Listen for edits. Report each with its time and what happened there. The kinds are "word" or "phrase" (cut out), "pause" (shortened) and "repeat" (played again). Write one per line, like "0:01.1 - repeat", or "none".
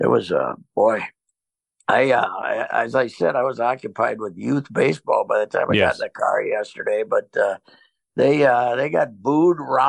none